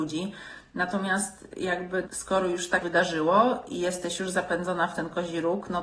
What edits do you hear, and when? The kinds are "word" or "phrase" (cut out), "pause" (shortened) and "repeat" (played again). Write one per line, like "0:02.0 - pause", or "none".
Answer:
0:02.0 - word
0:02.8 - word